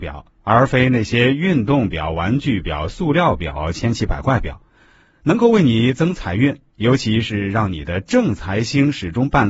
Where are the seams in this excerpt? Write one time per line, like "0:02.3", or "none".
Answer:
none